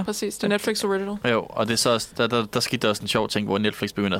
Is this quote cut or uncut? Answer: uncut